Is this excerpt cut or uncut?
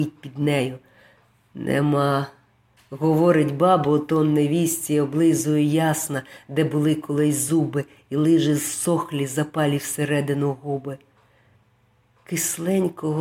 uncut